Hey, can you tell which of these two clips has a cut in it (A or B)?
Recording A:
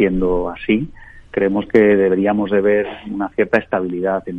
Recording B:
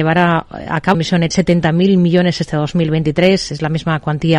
B